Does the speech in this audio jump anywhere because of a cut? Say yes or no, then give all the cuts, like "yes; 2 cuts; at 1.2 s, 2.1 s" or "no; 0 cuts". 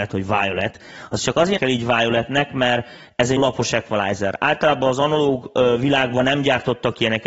yes; 2 cuts; at 1.6 s, 3.4 s